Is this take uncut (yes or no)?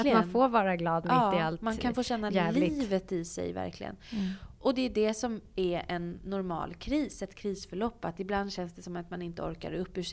yes